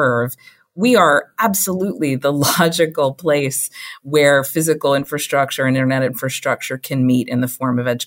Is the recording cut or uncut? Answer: uncut